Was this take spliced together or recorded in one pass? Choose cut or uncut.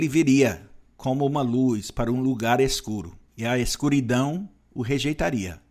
cut